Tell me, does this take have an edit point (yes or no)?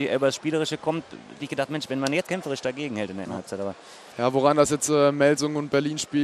yes